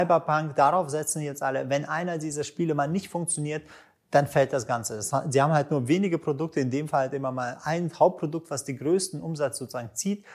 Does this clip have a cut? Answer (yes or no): no